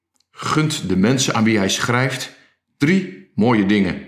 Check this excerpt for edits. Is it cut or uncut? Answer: uncut